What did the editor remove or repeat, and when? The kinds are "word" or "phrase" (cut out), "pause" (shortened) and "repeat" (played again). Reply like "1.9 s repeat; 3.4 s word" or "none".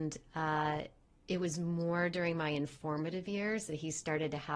none